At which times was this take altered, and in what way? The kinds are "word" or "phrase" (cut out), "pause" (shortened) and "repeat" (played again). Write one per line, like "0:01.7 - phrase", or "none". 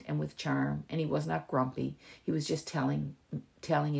none